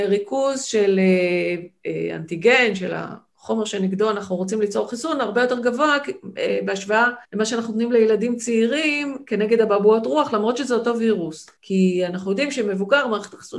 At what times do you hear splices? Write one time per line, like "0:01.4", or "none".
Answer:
0:07.2
0:11.6